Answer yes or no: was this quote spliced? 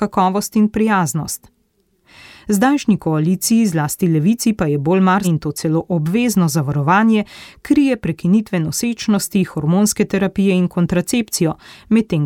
yes